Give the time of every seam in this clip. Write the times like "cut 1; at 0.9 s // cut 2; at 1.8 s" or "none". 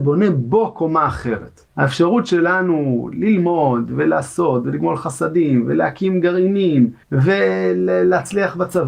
cut 1; at 1.7 s // cut 2; at 7.0 s